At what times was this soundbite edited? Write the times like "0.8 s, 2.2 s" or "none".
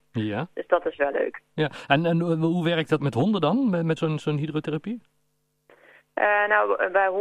3.0 s, 4.0 s